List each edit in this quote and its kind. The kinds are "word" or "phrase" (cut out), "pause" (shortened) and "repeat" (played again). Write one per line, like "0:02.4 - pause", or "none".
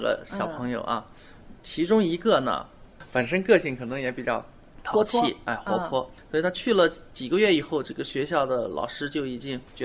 none